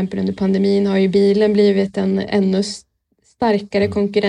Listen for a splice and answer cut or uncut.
uncut